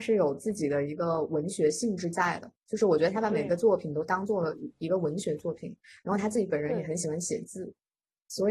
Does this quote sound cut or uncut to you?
uncut